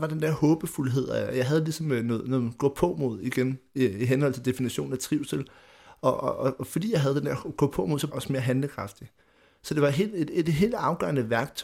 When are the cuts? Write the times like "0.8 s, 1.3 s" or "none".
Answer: 8.1 s

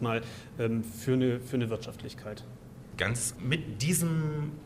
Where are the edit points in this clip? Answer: 3.4 s

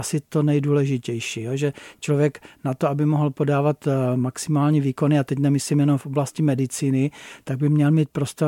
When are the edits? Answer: none

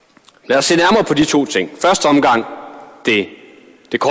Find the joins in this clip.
none

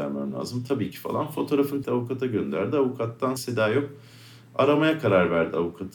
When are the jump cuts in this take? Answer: 1.8 s, 3.4 s

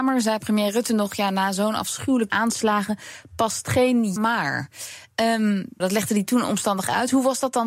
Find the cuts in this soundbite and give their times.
2.3 s, 4.2 s, 5.8 s

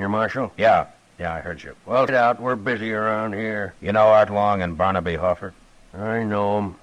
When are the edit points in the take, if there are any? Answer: 2.1 s, 3.8 s

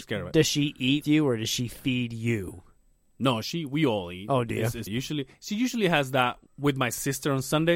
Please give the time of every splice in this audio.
1.0 s, 4.9 s, 6.5 s

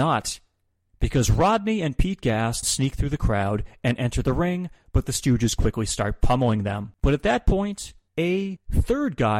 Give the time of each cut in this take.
2.6 s, 7.0 s

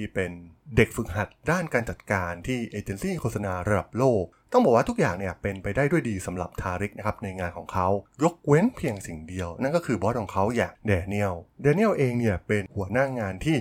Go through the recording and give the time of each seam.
11.5 s

